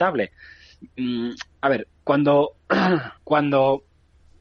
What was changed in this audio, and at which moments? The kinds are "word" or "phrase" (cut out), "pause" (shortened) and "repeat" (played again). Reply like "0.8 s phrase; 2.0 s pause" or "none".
3.2 s pause